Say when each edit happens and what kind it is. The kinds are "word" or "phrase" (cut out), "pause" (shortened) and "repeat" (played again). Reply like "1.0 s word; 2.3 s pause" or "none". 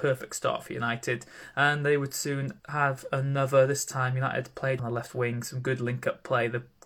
2.6 s pause; 4.8 s phrase